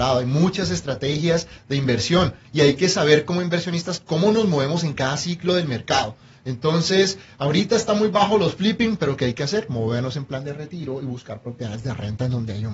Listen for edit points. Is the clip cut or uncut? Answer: uncut